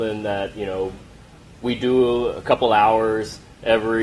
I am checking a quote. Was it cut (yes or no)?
no